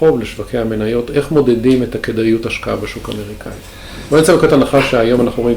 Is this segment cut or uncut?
uncut